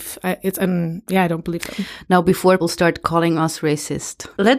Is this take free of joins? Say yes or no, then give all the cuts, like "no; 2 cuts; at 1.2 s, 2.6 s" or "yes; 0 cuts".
no; 1 cut; at 2.6 s